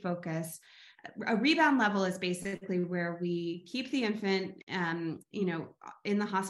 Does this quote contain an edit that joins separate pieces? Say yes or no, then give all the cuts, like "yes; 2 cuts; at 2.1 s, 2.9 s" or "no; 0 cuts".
no; 0 cuts